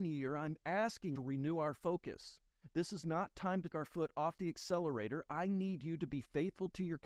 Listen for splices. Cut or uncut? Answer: cut